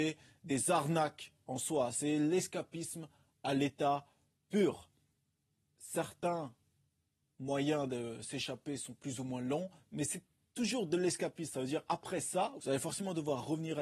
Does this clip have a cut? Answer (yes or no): no